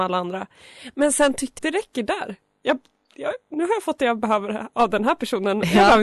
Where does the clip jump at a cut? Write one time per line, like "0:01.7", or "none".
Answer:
0:01.6